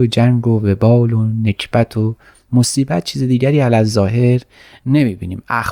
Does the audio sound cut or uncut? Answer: uncut